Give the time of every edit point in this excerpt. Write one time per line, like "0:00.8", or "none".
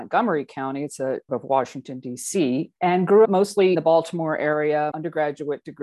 0:01.3
0:02.8
0:03.2
0:03.7
0:04.9

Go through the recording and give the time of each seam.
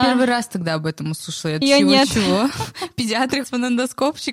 0:01.6
0:03.4

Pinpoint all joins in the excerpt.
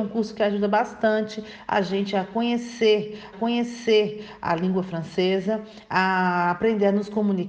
0:03.3

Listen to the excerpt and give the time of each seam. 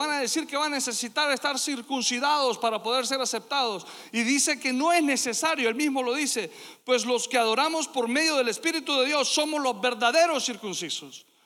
none

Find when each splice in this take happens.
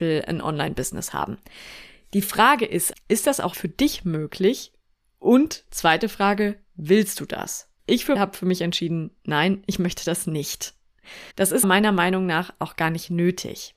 0:02.9
0:03.5
0:07.8
0:08.2
0:11.3
0:11.6

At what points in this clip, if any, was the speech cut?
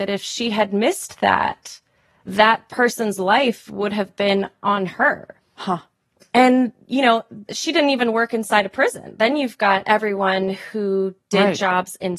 none

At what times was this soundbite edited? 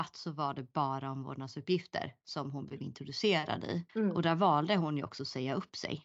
0:03.9

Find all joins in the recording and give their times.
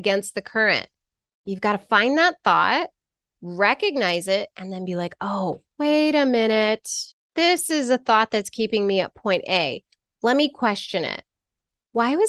0:05.7
0:07.1

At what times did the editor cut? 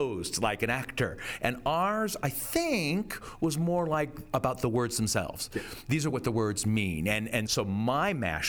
0:04.3
0:07.5

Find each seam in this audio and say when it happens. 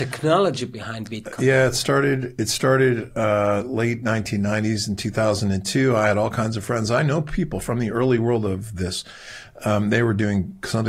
none

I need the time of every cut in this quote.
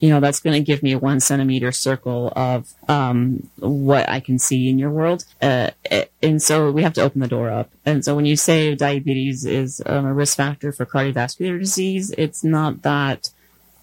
0:02.8
0:05.3

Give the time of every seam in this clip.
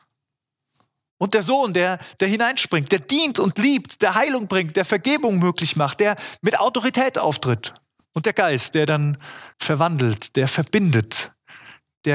0:08.0
0:09.5

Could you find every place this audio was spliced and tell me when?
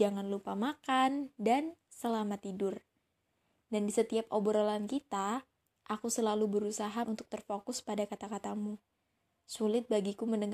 0:07.0

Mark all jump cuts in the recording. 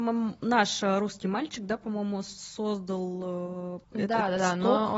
0:03.8

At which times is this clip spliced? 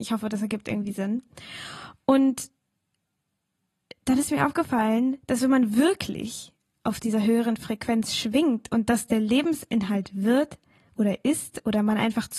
none

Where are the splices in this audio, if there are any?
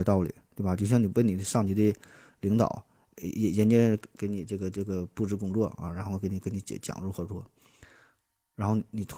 none

